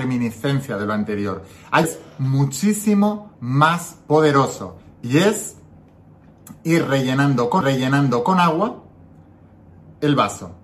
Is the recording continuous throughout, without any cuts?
no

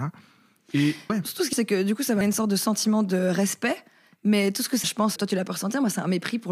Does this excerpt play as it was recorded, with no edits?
no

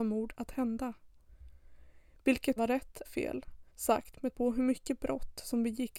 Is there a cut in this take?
yes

